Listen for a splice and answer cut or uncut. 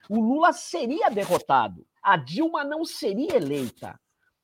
cut